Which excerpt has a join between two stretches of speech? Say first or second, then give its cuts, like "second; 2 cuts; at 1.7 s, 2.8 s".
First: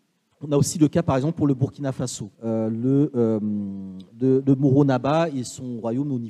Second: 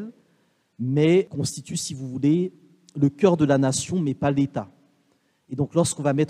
first; 1 cut; at 2.3 s